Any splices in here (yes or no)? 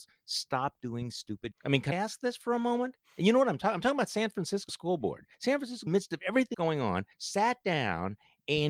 yes